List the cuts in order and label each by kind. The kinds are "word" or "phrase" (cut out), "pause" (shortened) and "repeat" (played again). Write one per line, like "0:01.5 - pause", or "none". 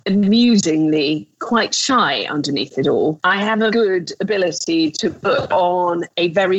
0:03.7 - word